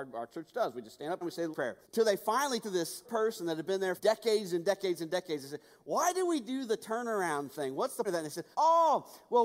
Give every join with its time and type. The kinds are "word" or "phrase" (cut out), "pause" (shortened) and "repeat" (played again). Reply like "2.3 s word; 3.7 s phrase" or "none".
1.2 s phrase; 1.5 s word; 1.8 s pause; 2.6 s word; 3.0 s word; 4.0 s word; 8.0 s word; 8.5 s pause